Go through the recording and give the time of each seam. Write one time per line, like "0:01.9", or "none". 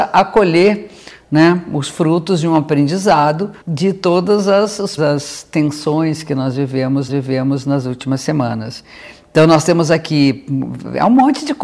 0:03.6
0:05.0
0:07.1